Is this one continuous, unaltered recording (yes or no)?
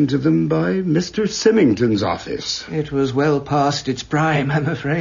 yes